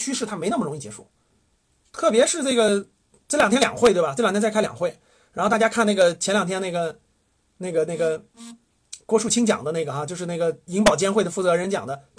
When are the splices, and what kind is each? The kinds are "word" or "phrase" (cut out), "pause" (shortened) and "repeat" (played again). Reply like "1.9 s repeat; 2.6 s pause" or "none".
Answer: none